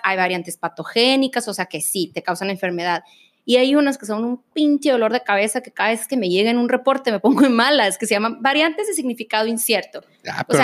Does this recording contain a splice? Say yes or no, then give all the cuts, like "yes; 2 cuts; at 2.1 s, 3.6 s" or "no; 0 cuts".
no; 0 cuts